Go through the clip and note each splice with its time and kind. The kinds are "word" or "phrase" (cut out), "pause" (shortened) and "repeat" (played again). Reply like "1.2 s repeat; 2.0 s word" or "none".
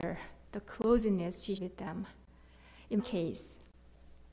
1.6 s word; 3.0 s word